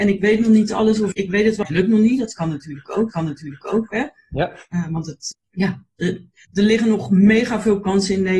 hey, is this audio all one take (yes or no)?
no